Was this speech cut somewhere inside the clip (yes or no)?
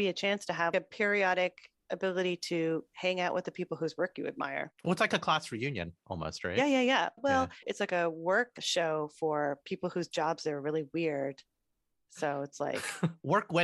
no